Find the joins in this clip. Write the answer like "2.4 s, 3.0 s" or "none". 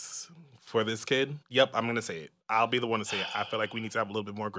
1.4 s, 2.4 s